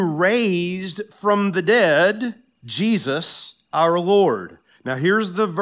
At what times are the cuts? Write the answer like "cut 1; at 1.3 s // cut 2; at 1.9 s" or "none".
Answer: none